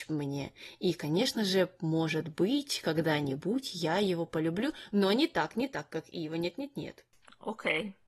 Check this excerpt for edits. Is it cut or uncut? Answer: uncut